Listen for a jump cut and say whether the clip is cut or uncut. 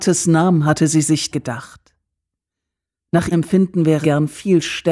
cut